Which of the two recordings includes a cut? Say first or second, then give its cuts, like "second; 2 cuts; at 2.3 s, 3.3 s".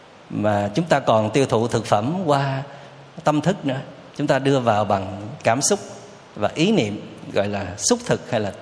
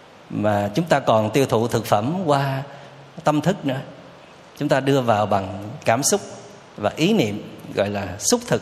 first; 1 cut; at 4.1 s